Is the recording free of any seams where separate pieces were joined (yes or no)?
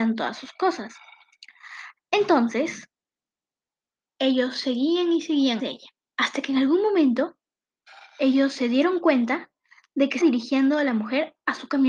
no